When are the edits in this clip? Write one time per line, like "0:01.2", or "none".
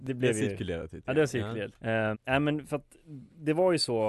0:01.7
0:02.1